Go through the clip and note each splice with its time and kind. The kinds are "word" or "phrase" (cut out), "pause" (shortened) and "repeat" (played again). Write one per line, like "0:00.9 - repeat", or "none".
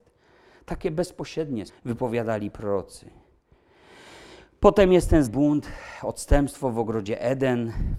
0:01.7 - word
0:05.3 - word